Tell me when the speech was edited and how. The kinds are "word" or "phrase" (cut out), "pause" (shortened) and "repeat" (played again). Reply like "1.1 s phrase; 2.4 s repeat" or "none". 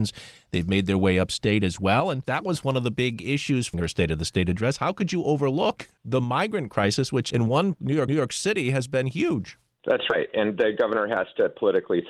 3.7 s phrase; 7.7 s word; 8.1 s repeat

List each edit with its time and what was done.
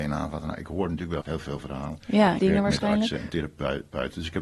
1.2 s phrase; 2.4 s phrase

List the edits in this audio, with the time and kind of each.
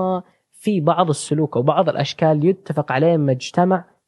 none

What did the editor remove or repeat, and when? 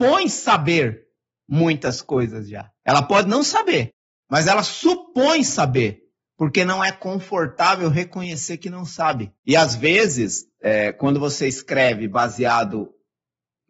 2.8 s pause; 9.4 s pause

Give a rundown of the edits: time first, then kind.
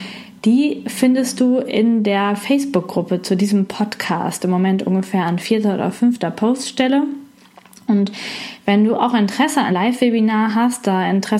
9.7 s word

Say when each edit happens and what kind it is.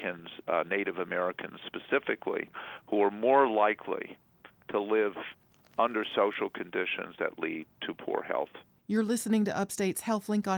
none

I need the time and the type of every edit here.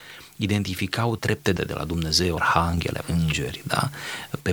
1.2 s word; 1.6 s word; 2.4 s word; 3.0 s word

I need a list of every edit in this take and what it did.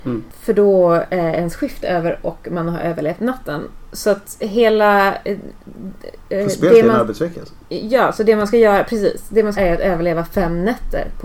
9.6 s word

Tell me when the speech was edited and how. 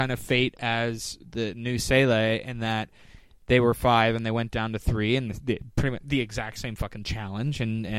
none

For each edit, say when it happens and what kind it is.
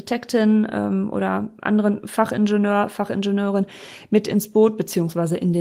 none

